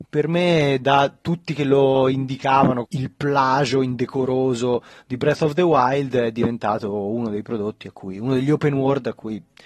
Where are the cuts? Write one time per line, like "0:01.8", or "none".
0:02.9